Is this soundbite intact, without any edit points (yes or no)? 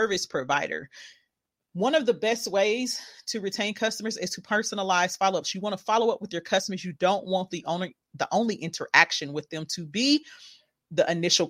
yes